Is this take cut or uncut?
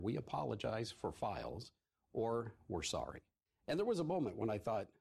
uncut